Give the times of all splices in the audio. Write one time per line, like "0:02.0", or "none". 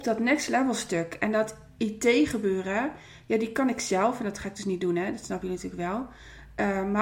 none